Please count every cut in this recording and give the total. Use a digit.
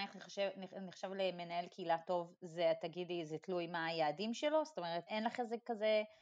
1